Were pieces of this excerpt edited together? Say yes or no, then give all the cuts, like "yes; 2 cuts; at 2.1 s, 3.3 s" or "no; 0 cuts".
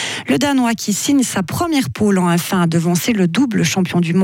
no; 0 cuts